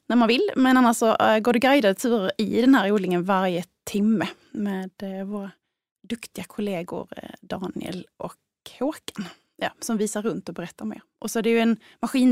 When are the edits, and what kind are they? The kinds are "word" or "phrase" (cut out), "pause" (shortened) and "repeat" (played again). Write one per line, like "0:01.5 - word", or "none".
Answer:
none